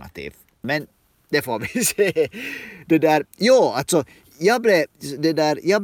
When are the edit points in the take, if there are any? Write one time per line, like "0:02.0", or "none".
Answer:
none